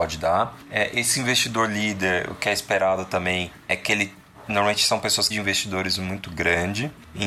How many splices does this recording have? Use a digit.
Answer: 1